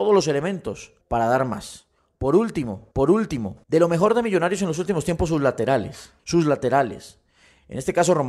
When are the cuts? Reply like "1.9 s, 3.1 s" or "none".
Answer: 1.0 s, 2.9 s, 3.6 s, 6.2 s

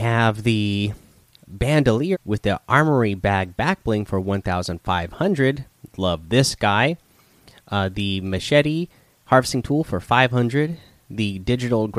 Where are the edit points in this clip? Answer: 2.1 s

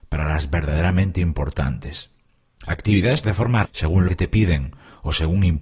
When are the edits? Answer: 3.2 s, 3.6 s, 4.1 s

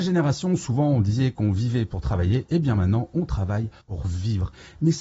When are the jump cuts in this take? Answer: 3.8 s

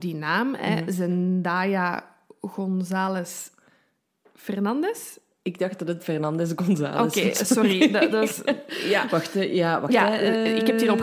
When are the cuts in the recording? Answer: 6.0 s

